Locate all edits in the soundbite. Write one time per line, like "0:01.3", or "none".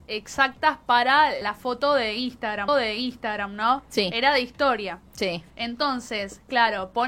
0:01.4
0:02.7
0:05.5